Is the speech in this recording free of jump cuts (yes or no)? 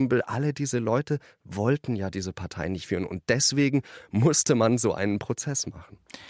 yes